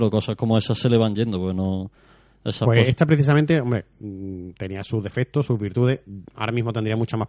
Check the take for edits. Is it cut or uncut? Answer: uncut